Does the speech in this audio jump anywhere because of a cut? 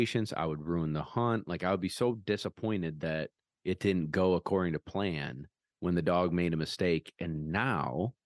no; 0 cuts

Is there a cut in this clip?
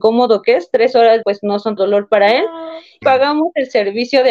yes; 3 cuts; at 1.2 s, 1.8 s, 3.0 s

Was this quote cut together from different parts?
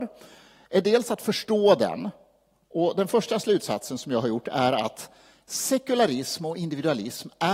no; 0 cuts

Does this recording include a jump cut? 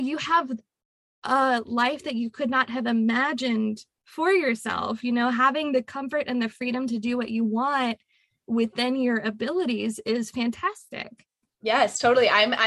no; 0 cuts

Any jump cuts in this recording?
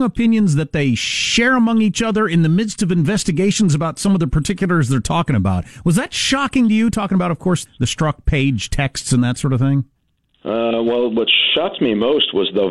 yes; 1 cut; at 7.7 s

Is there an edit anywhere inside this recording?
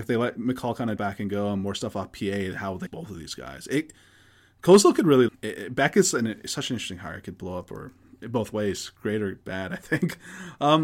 yes; 3 cuts; at 1.0 s, 2.9 s, 5.3 s

